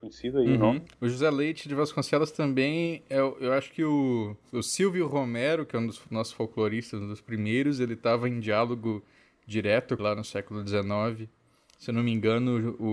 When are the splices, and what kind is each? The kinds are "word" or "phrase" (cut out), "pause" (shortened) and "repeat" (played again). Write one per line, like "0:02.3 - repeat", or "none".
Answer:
0:00.9 - pause
0:10.0 - phrase